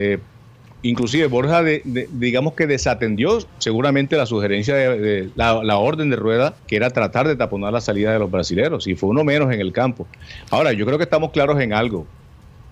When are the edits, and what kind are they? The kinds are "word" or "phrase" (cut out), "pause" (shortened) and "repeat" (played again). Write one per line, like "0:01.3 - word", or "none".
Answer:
0:06.6 - pause